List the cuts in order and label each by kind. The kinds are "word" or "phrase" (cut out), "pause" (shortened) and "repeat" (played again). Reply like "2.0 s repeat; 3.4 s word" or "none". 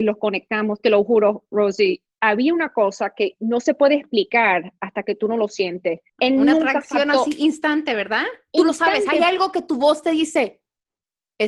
2.1 s pause; 6.1 s pause